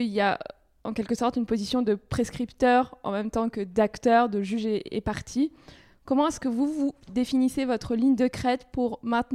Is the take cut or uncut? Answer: uncut